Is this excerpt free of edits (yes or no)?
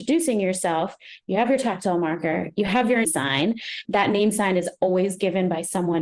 no